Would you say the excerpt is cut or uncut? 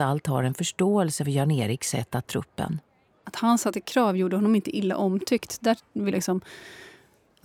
cut